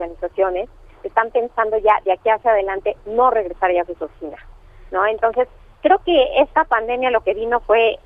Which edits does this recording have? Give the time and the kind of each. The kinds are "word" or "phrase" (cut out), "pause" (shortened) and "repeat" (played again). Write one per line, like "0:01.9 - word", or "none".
none

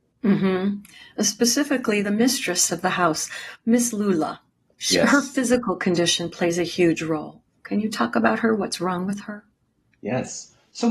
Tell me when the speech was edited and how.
none

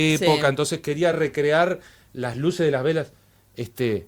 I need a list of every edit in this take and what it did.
none

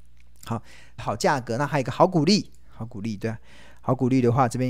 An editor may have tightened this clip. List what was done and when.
0:01.0 - phrase

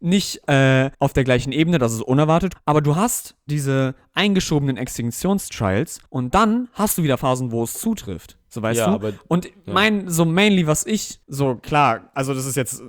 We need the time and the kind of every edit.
0:00.9 - pause
0:02.5 - word
0:06.1 - pause
0:08.4 - pause
0:11.2 - pause

